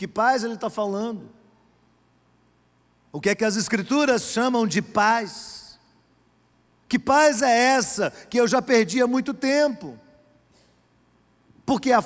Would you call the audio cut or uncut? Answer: uncut